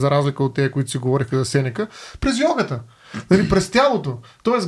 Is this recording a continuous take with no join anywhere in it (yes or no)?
yes